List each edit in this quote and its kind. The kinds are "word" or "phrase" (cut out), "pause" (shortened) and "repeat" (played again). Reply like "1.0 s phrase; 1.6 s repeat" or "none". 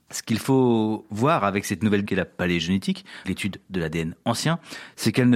2.1 s word; 3.2 s word